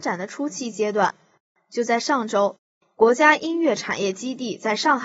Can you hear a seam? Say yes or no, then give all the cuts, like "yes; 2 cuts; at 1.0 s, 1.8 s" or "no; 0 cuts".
no; 0 cuts